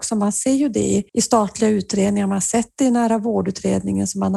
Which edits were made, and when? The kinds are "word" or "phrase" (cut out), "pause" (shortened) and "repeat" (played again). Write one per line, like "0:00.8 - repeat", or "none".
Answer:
0:01.1 - pause